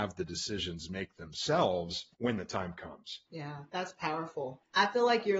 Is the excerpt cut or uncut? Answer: cut